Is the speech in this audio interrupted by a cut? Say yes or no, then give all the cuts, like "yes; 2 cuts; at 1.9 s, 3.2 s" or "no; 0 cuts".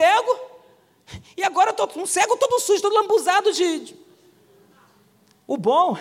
no; 0 cuts